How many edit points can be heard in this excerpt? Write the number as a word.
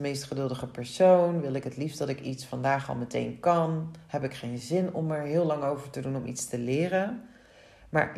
zero